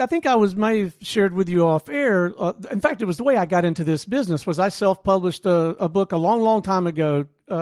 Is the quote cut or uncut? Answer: uncut